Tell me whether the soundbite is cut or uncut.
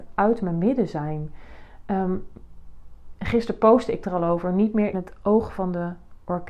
cut